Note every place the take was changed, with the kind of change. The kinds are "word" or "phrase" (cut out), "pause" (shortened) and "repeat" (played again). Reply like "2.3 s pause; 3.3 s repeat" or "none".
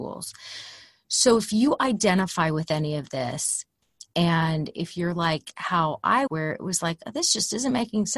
6.3 s word